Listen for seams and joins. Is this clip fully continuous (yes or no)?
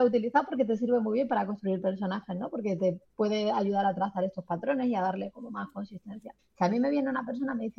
no